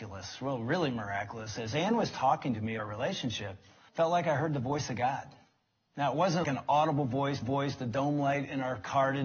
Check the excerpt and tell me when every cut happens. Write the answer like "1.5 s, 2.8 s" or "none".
2.8 s, 3.9 s, 6.4 s, 7.4 s